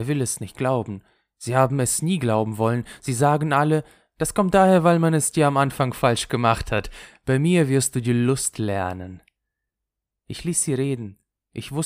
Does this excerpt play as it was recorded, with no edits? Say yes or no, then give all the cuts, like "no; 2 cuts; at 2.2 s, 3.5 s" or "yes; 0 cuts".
yes; 0 cuts